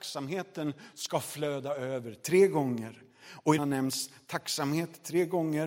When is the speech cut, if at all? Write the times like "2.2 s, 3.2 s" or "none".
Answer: 3.6 s